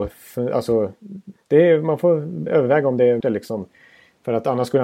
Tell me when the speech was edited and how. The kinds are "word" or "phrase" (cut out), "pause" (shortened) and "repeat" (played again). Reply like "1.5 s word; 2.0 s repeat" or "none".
2.5 s word; 3.2 s word